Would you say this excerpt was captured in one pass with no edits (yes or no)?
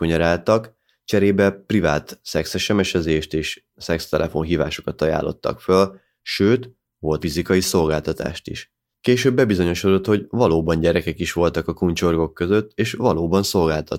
no